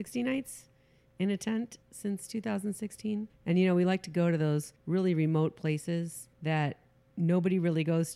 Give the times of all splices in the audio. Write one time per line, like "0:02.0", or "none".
0:01.8
0:03.3
0:04.8
0:06.3